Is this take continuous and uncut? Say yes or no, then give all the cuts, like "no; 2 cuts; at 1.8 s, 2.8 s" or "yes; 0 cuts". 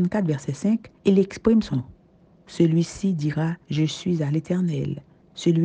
no; 3 cuts; at 1.0 s, 1.7 s, 3.6 s